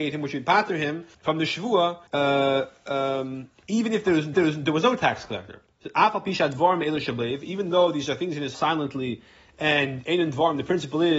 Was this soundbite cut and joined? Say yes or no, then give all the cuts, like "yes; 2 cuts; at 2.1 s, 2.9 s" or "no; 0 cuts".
yes; 5 cuts; at 1.1 s, 2.1 s, 4.3 s, 5.7 s, 8.5 s